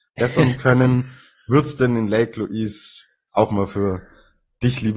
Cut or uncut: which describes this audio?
uncut